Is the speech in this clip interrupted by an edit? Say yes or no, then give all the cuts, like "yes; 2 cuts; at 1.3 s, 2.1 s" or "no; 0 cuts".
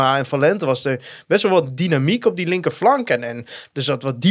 no; 0 cuts